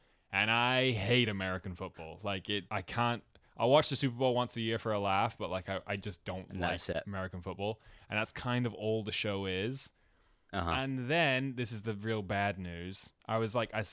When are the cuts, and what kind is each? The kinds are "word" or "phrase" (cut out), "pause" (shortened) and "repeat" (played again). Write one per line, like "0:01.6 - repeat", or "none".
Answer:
0:02.7 - word